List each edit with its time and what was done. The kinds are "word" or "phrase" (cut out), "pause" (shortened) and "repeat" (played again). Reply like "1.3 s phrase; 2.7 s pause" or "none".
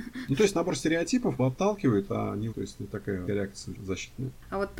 1.4 s phrase; 2.5 s word; 3.3 s word; 3.7 s word